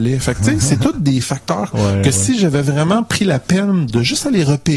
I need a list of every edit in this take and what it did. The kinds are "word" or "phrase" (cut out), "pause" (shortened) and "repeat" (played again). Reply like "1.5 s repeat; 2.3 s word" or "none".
1.7 s phrase